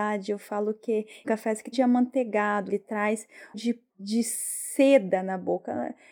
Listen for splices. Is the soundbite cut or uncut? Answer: cut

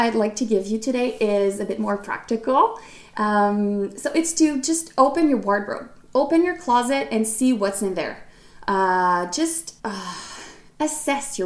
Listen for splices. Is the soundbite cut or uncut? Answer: cut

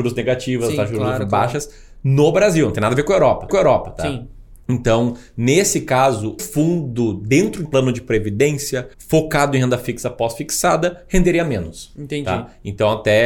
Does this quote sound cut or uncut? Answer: cut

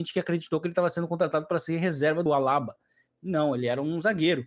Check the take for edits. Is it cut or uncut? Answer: cut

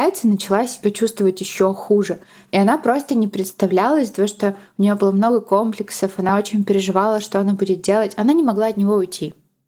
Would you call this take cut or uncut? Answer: uncut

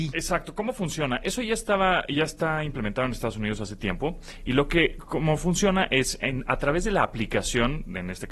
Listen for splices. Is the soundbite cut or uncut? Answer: uncut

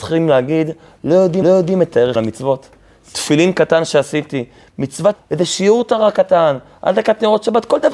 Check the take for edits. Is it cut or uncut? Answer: cut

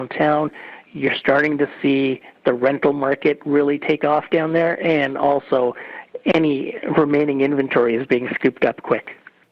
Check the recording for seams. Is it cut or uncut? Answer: uncut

